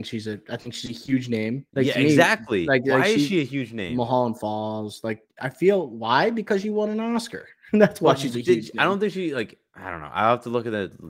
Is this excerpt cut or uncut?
cut